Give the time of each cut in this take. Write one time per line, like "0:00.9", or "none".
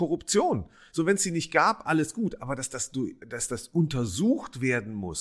none